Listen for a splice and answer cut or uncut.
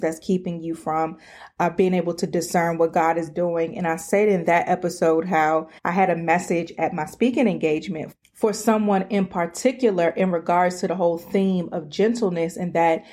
cut